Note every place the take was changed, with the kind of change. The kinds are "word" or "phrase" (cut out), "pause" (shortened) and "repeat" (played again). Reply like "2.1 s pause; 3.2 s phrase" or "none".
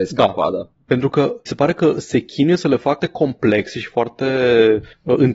1.5 s word; 3.0 s word